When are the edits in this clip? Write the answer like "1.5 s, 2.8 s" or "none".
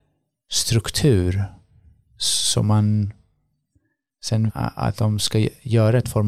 4.5 s